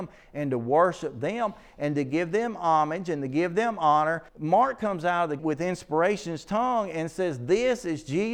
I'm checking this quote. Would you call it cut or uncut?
cut